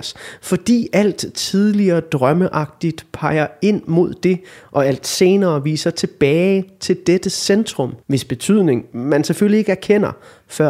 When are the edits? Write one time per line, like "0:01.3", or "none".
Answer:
0:08.0